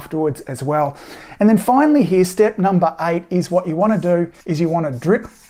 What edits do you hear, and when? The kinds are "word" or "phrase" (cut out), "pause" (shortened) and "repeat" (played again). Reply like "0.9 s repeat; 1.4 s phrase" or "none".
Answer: 4.4 s pause